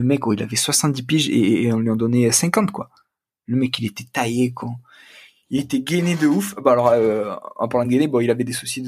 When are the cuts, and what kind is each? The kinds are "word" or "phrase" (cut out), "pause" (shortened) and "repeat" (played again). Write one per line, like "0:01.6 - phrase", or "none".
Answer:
none